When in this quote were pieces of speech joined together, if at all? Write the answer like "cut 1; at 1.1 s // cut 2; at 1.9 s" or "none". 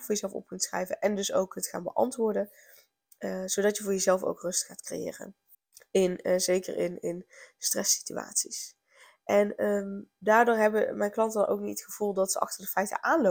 cut 1; at 5.5 s